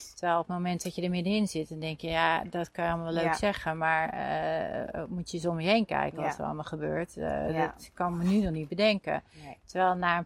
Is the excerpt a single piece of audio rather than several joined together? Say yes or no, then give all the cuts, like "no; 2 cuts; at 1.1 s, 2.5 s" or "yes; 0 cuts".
yes; 0 cuts